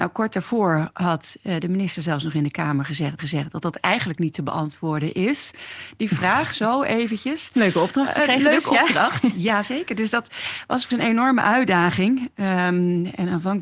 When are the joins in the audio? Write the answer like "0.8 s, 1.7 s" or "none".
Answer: 3.2 s, 10.9 s